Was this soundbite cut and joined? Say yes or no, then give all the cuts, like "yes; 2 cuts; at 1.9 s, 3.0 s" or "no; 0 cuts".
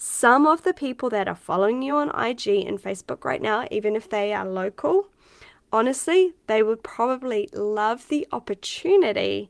no; 0 cuts